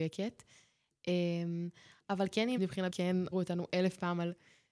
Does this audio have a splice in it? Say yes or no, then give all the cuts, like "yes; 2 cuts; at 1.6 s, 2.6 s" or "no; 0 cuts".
yes; 3 cuts; at 2.6 s, 2.9 s, 3.3 s